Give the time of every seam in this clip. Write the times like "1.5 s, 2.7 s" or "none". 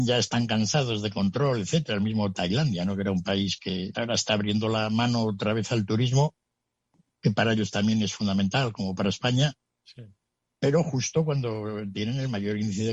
3.9 s